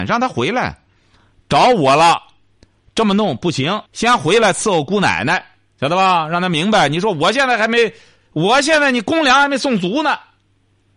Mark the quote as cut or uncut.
cut